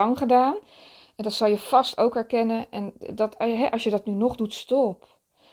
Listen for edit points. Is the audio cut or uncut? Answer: uncut